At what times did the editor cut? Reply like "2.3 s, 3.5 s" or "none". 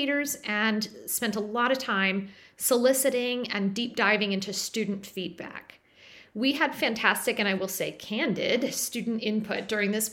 none